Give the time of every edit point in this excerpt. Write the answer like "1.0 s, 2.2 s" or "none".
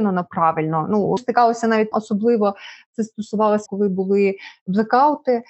1.2 s, 1.9 s, 3.7 s